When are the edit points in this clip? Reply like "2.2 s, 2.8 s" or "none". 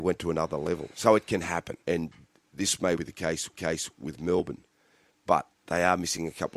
1.8 s, 3.0 s, 3.5 s, 5.6 s

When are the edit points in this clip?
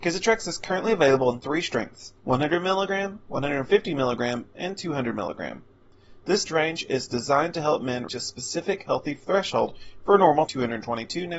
2.2 s, 6.5 s, 8.1 s, 10.5 s

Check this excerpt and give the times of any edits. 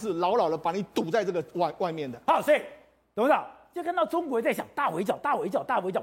none

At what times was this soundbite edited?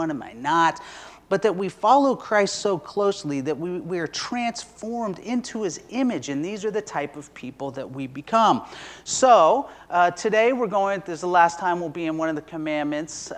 none

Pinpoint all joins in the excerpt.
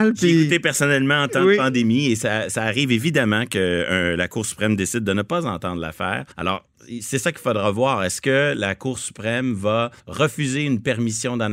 6.3 s, 10.0 s

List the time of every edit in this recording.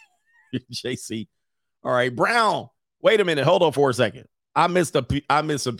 none

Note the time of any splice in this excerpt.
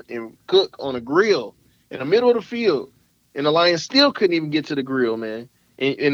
none

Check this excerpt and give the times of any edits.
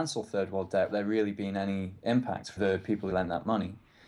0.9 s, 2.6 s, 3.1 s

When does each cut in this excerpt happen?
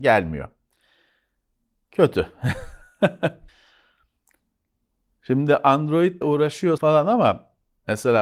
3.5 s, 6.2 s, 6.8 s

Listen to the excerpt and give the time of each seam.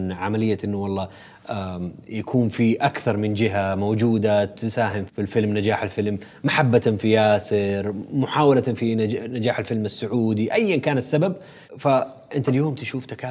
5.1 s, 11.7 s

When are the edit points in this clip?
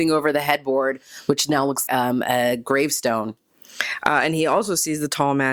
1.9 s

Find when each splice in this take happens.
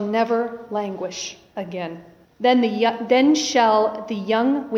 2.2 s

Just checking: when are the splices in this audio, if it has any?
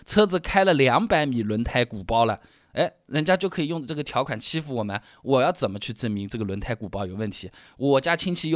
none

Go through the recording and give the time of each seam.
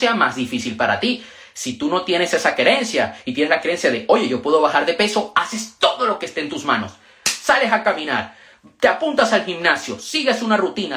none

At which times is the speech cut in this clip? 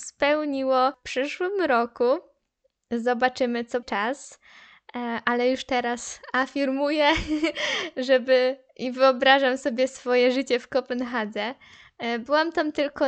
3.8 s

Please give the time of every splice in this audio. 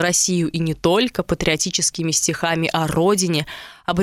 none

